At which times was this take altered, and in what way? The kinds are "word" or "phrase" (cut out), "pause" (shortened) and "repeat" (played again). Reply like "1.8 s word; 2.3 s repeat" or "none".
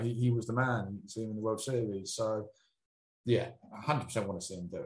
none